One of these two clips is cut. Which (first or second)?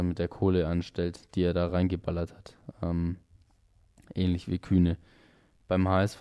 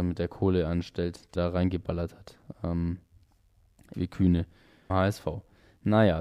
second